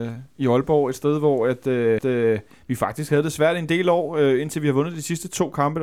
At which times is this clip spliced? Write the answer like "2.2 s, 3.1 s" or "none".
2.0 s